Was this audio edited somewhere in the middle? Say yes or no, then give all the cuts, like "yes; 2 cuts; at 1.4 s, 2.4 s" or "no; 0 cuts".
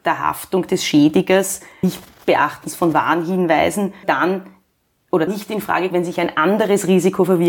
yes; 4 cuts; at 1.8 s, 4.0 s, 5.3 s, 5.9 s